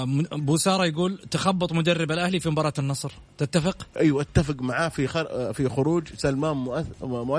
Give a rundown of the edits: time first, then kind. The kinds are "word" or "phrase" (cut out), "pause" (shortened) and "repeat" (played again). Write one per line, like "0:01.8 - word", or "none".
none